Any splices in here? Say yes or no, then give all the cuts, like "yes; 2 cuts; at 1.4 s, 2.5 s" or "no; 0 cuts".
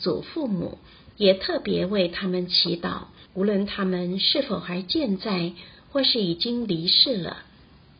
yes; 2 cuts; at 1.1 s, 3.3 s